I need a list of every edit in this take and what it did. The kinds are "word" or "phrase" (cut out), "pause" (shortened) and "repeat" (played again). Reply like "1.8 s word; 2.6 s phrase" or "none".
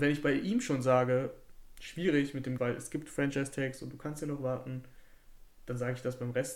2.6 s word

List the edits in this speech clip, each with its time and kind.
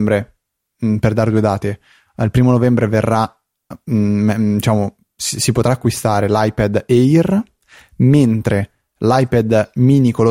none

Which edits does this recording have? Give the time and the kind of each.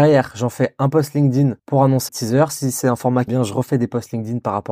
1.6 s pause; 2.1 s word; 3.3 s word

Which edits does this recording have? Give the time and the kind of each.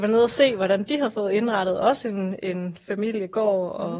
none

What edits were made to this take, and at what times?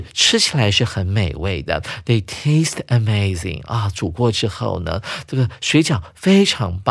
none

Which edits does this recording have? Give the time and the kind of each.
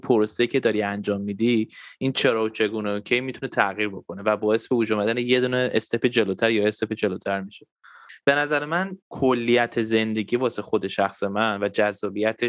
9.0 s pause

